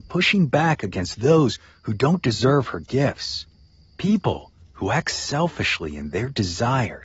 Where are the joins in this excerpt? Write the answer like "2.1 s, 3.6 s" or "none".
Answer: none